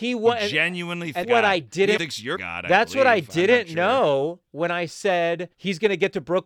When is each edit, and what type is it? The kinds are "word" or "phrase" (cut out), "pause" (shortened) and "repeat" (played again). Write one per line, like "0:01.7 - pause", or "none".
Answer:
0:01.2 - phrase
0:02.0 - word
0:02.3 - word
0:05.5 - pause

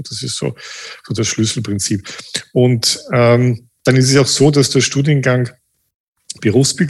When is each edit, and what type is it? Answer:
none

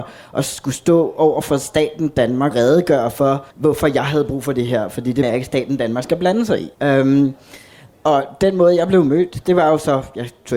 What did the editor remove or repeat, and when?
0:02.5 - word
0:03.5 - pause
0:05.2 - word
0:06.7 - pause

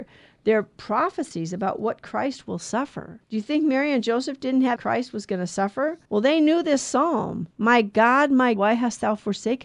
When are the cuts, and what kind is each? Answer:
0:03.2 - pause
0:04.8 - phrase
0:06.1 - pause
0:07.5 - pause
0:08.6 - word

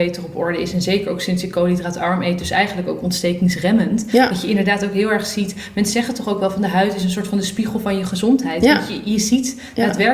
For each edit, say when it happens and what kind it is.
none

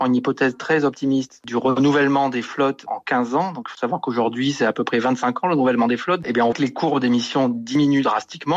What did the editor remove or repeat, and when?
0:06.5 - word

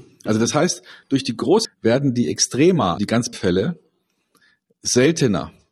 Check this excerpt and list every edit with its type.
0:01.6 - word
0:03.0 - word
0:03.3 - word

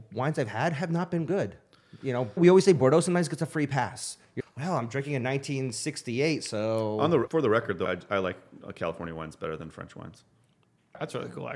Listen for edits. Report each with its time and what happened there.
0:02.4 - word
0:04.4 - word
0:07.3 - word
0:07.8 - word

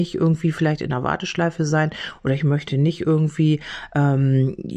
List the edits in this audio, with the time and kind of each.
none

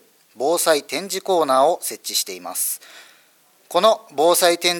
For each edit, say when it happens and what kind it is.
none

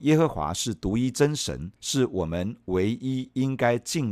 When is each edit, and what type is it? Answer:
0:01.8 - pause

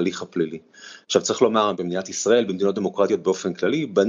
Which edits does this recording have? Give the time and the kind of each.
none

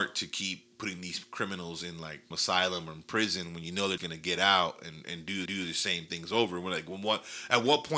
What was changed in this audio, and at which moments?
0:02.3 - word
0:04.0 - word
0:05.5 - repeat

